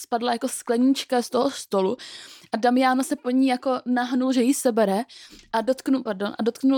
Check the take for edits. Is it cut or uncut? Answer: uncut